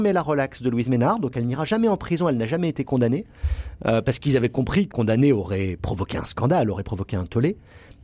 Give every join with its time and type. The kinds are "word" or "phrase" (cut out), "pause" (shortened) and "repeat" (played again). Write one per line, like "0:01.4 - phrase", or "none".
0:04.9 - word